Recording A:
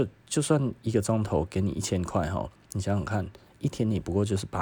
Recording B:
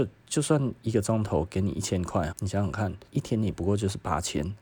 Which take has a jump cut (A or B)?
B